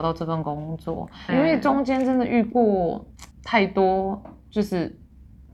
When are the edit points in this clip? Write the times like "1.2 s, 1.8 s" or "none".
1.3 s, 3.3 s